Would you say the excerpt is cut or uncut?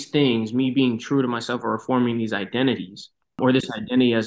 uncut